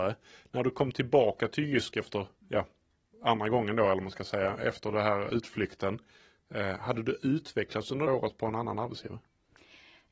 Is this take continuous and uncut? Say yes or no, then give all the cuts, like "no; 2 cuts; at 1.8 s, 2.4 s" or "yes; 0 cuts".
no; 2 cuts; at 2.4 s, 8.1 s